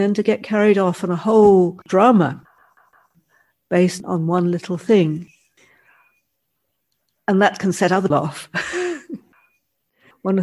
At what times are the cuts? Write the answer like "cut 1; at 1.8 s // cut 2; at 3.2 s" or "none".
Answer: cut 1; at 1.8 s // cut 2; at 8.1 s